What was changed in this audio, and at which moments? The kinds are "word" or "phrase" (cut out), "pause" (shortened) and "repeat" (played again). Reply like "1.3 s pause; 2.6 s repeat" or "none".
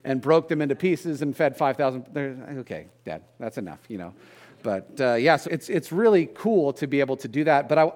5.4 s word